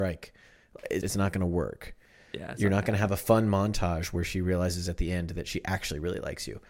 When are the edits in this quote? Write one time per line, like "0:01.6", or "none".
0:01.0